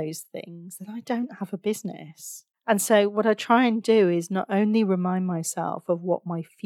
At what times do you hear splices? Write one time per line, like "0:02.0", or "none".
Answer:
0:02.5

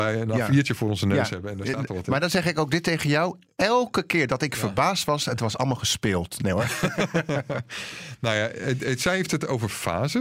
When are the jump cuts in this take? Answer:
none

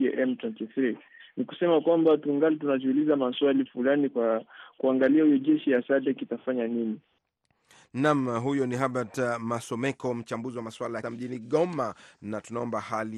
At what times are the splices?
0:03.7
0:11.0

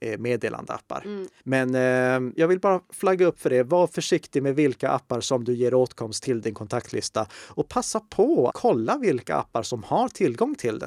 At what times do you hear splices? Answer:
0:01.4
0:02.4
0:08.5

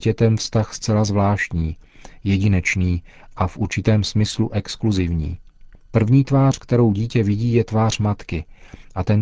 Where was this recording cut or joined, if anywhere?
none

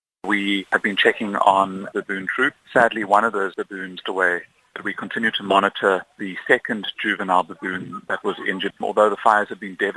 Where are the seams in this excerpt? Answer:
0:01.9
0:04.0
0:08.8

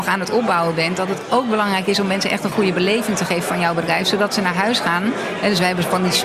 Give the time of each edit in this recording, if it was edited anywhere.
none

